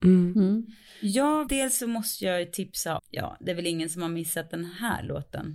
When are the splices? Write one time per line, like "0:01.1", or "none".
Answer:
0:01.5
0:03.0